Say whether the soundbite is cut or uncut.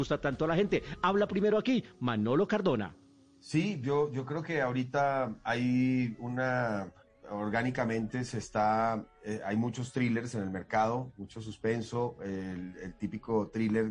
uncut